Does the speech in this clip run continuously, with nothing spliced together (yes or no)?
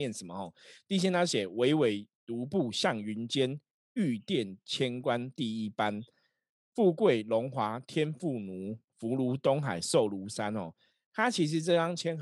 yes